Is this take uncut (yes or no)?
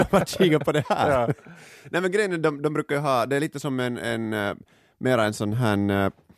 yes